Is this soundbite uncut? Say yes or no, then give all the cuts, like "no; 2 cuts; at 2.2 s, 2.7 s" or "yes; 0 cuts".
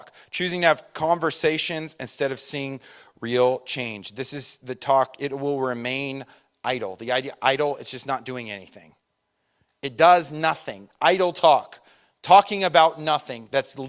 yes; 0 cuts